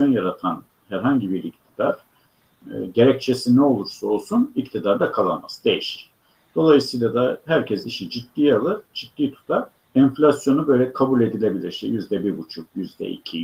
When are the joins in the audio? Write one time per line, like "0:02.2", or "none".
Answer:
none